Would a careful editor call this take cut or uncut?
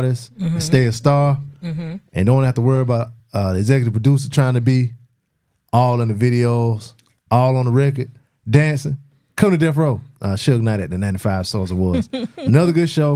uncut